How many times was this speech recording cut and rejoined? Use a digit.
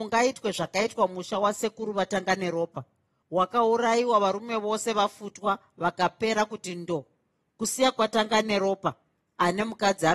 0